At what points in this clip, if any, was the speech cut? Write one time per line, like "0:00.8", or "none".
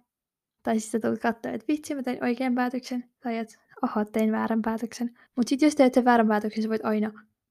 0:05.3